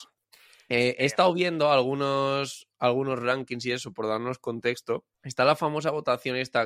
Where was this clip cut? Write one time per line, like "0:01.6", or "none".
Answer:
0:05.1